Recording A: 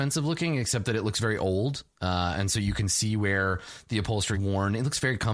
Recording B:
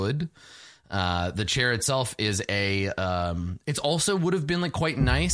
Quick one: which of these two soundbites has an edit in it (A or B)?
A